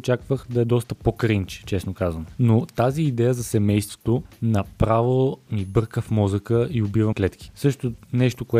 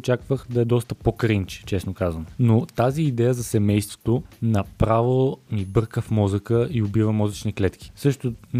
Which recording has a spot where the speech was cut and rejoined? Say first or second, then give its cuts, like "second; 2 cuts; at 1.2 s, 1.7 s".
first; 1 cut; at 7.1 s